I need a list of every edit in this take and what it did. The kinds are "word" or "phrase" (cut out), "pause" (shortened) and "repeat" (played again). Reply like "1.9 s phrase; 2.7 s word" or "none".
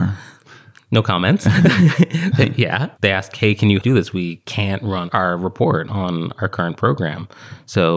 3.0 s word; 3.8 s phrase